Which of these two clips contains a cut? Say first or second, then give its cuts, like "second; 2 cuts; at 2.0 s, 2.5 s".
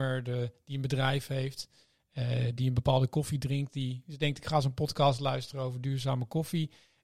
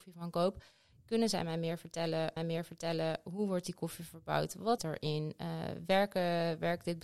second; 2 cuts; at 2.4 s, 4.8 s